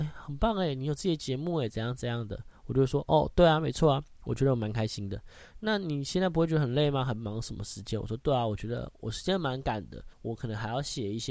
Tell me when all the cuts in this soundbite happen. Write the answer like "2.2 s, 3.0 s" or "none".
10.1 s